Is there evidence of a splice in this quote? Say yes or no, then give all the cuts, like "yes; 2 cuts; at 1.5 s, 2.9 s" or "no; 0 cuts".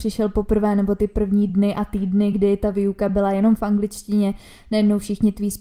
no; 0 cuts